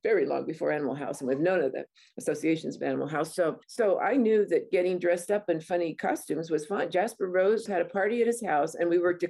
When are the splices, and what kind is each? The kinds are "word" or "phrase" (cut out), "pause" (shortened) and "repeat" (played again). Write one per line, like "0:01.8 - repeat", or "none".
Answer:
0:03.6 - pause